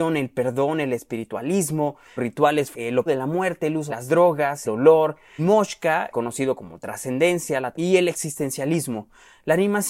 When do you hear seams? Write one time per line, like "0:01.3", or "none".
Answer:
0:02.2
0:02.7
0:03.1
0:03.9
0:04.6
0:05.4
0:06.1
0:07.7